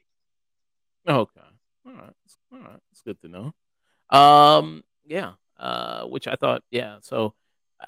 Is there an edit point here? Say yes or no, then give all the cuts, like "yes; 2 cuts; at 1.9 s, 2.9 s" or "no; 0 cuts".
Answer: yes; 1 cut; at 2.4 s